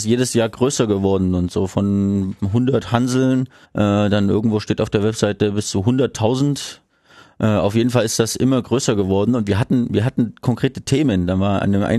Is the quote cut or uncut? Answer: cut